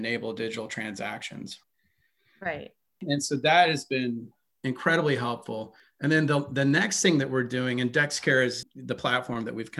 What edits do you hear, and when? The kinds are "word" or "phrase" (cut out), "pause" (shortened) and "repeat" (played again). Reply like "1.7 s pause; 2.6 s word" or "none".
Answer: none